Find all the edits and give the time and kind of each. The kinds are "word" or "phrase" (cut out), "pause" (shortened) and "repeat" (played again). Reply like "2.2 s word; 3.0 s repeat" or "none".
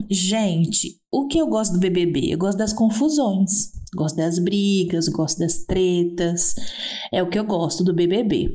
none